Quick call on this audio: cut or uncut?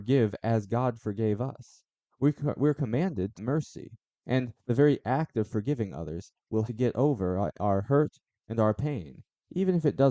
cut